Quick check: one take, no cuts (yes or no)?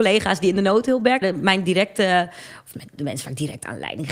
no